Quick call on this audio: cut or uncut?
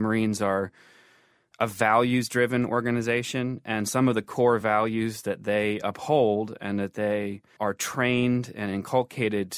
uncut